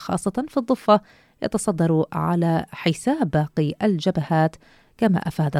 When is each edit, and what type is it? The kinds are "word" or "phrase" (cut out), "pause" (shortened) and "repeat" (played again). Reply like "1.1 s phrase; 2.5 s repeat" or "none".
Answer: none